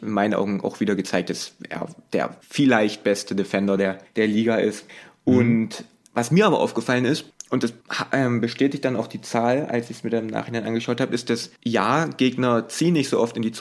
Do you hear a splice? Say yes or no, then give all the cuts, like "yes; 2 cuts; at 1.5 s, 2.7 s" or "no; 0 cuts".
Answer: no; 0 cuts